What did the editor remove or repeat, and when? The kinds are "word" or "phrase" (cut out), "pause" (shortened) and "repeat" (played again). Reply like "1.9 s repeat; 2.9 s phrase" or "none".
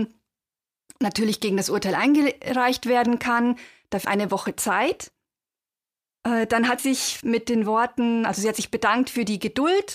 4.0 s word; 6.8 s word; 7.2 s word